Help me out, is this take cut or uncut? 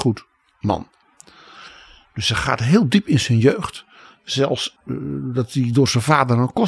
uncut